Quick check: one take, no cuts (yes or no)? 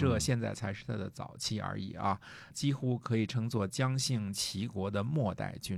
no